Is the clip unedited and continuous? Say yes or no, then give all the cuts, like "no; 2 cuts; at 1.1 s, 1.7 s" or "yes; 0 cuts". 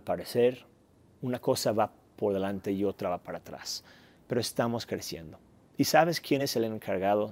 yes; 0 cuts